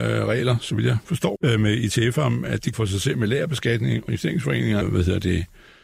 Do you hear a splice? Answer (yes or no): yes